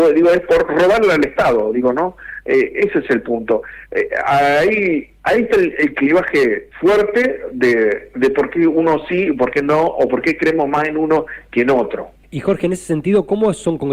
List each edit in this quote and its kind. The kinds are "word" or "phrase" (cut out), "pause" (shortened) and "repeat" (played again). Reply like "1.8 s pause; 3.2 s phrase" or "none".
6.7 s pause; 12.2 s pause